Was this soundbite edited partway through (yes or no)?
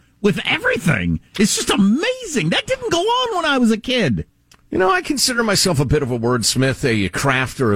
no